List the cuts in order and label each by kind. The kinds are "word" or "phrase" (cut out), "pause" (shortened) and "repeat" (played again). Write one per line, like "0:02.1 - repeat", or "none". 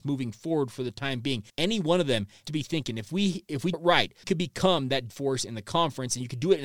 0:01.5 - pause
0:02.4 - word
0:03.7 - word
0:04.2 - word
0:05.1 - word